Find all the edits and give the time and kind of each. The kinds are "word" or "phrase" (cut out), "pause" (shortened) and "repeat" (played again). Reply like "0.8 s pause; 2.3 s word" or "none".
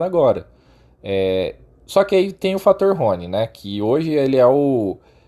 none